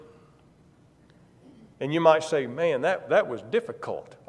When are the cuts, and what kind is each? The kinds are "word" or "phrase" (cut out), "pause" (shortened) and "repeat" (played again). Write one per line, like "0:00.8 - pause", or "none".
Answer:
none